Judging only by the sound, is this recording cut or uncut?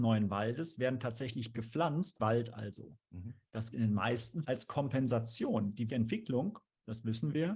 cut